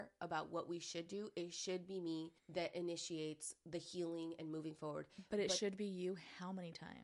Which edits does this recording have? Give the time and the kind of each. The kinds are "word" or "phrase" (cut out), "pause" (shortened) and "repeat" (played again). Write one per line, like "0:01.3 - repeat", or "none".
0:02.4 - pause